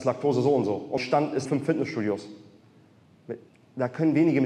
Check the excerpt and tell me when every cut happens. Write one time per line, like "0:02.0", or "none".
0:01.0
0:01.5
0:03.5